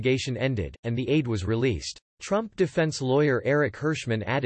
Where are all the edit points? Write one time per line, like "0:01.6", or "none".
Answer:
0:02.1